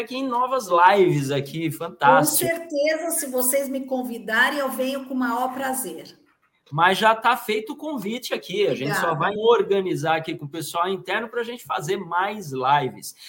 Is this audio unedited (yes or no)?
no